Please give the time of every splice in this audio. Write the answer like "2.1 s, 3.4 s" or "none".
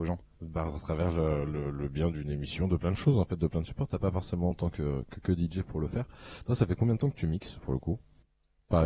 none